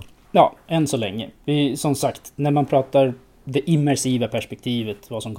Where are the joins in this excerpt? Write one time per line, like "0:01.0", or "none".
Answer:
none